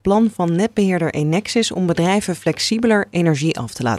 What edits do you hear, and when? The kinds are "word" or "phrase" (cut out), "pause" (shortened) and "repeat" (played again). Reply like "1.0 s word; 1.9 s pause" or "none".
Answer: none